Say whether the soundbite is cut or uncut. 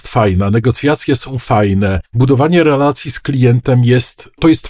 cut